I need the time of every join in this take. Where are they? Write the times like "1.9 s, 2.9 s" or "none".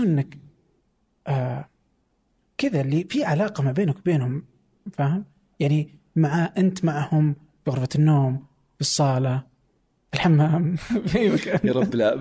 none

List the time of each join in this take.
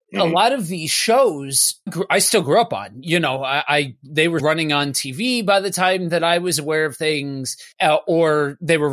1.9 s, 4.4 s, 7.7 s

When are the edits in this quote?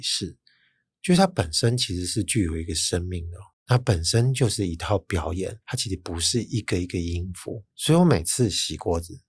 3.5 s, 5.6 s, 7.7 s

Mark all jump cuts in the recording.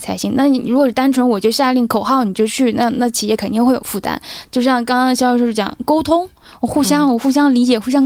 none

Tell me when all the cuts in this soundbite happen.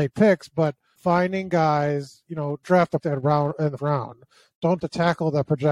1.0 s, 2.6 s, 3.0 s, 3.8 s, 4.8 s

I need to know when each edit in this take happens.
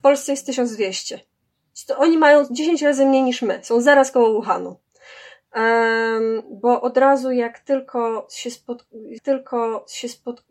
9.2 s

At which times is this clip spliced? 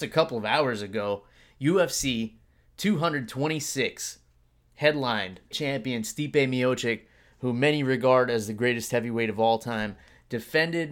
5.5 s

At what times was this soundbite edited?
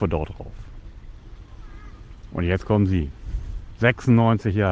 none

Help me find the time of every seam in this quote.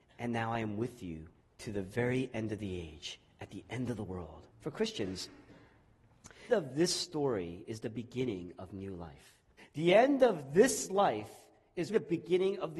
1.4 s, 4.5 s, 6.5 s, 9.6 s, 11.9 s

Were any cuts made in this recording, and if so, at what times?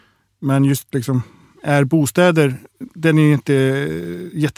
none

